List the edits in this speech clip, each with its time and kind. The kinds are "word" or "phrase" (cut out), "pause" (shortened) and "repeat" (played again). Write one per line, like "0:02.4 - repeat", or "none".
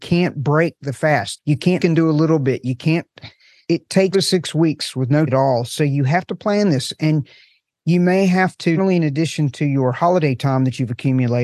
0:01.8 - word
0:04.1 - word
0:05.3 - word
0:08.8 - word